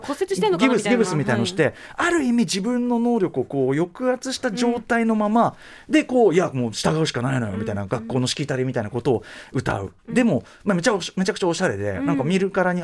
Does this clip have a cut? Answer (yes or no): no